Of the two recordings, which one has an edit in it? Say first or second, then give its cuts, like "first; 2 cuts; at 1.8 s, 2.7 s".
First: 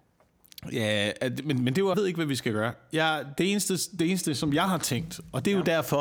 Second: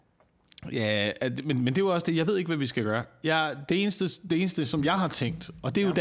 first; 1 cut; at 1.9 s